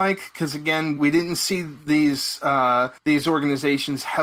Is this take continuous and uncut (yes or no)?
no